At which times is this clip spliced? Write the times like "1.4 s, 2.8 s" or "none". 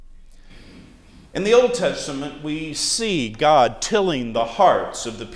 1.3 s